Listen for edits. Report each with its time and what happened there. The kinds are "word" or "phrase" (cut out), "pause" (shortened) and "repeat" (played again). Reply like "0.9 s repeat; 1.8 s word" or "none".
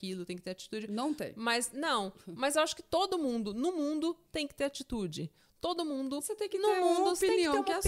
none